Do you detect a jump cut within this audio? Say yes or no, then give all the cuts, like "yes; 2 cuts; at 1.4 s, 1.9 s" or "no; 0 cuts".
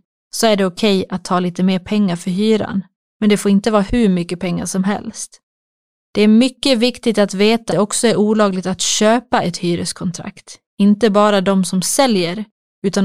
yes; 1 cut; at 7.7 s